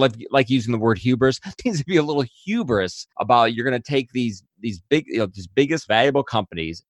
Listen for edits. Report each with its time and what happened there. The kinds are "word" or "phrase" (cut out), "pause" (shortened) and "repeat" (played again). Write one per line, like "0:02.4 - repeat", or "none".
0:01.6 - word
0:03.1 - pause
0:05.9 - word